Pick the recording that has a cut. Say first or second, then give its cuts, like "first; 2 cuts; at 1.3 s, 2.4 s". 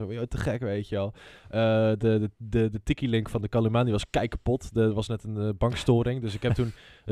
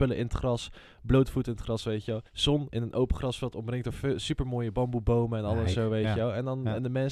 second; 2 cuts; at 2.3 s, 5.7 s